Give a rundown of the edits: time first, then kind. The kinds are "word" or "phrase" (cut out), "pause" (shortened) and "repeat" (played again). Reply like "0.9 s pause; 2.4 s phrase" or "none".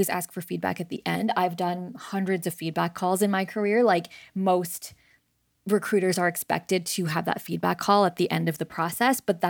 none